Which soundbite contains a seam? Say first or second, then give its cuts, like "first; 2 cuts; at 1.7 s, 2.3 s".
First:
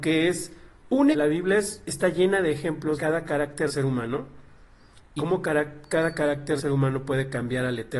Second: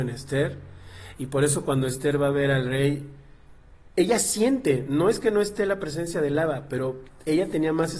first; 5 cuts; at 1.1 s, 3.0 s, 3.7 s, 5.2 s, 6.6 s